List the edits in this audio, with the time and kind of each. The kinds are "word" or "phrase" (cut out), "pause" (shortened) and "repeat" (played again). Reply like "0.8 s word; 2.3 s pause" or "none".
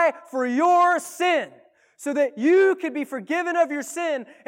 none

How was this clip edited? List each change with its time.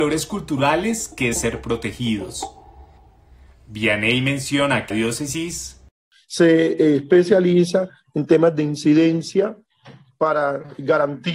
1.3 s word; 4.9 s word

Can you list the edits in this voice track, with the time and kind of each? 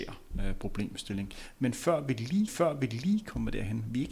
2.5 s repeat

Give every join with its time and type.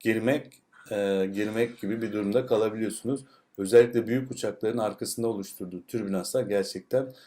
none

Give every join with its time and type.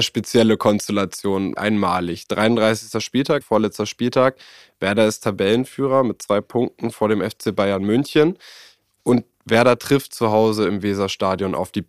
1.6 s word; 3.4 s word

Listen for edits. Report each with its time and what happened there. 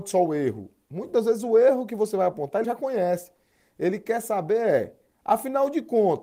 2.6 s word

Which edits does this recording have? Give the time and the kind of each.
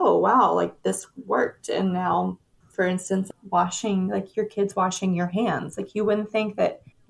none

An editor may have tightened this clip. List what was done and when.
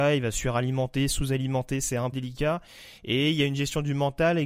2.1 s word

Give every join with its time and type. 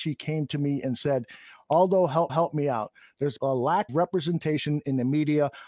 2.3 s repeat; 3.4 s word; 3.9 s word

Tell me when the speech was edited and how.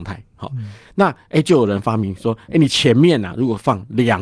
none

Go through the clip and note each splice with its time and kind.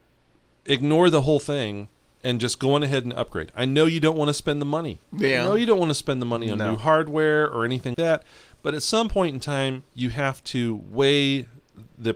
5.0 s pause; 7.9 s word

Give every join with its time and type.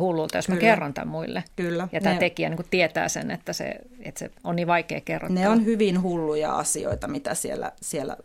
4.4 s pause

